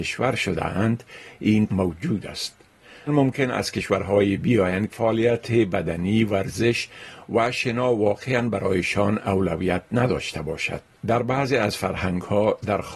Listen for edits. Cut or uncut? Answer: cut